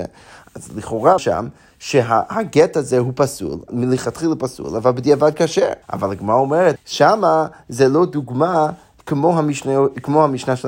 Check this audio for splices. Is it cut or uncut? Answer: cut